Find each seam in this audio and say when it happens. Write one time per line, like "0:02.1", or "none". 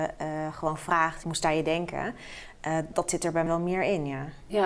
0:01.2
0:02.9
0:03.5